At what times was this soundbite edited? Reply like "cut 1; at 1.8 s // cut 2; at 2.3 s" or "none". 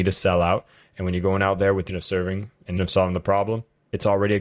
cut 1; at 1.9 s // cut 2; at 2.8 s